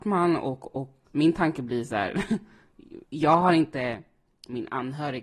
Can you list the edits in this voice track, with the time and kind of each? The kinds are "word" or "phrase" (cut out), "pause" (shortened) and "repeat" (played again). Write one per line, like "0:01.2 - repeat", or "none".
0:01.1 - word
0:03.1 - pause